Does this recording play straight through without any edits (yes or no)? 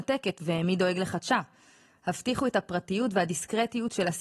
yes